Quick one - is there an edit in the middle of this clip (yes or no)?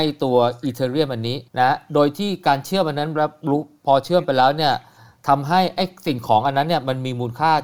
yes